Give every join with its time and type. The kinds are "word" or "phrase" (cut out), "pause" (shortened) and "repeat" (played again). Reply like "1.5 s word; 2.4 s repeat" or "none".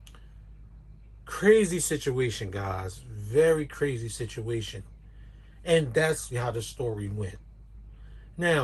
6.3 s word